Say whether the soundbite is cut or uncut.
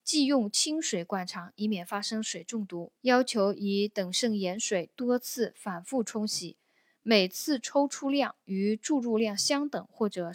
cut